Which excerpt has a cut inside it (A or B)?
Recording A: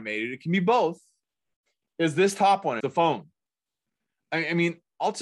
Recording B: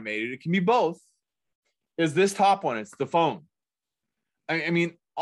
A